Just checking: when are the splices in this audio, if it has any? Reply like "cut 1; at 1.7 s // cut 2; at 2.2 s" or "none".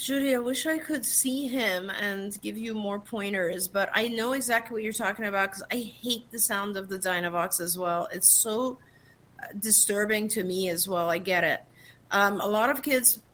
none